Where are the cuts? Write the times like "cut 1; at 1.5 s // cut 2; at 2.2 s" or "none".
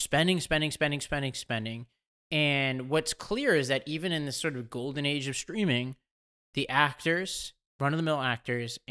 none